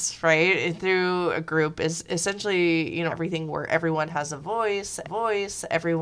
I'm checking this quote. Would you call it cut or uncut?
cut